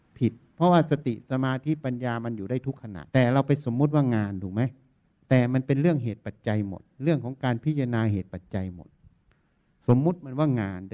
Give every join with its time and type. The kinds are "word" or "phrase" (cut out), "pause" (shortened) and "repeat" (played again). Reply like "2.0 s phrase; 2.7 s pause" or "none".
3.1 s pause; 5.0 s pause